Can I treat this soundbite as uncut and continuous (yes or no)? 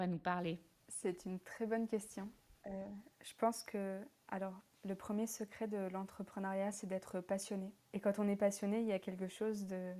no